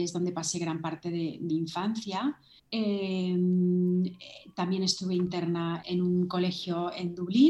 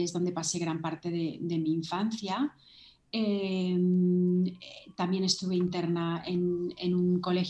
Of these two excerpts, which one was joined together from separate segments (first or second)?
first